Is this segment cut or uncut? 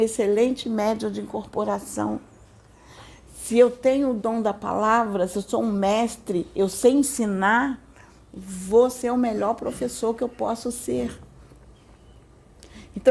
uncut